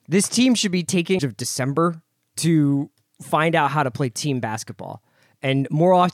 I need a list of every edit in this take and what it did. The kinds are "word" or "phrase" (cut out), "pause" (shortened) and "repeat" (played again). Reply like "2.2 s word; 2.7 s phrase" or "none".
1.2 s word